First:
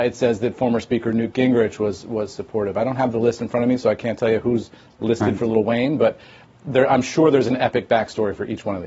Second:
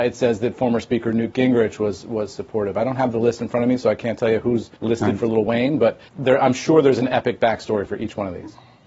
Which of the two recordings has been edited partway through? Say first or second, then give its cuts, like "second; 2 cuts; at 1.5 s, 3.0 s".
second; 2 cuts; at 4.8 s, 6.1 s